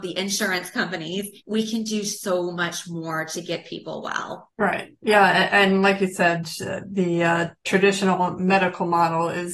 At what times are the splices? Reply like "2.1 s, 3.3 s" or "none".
1.4 s, 4.5 s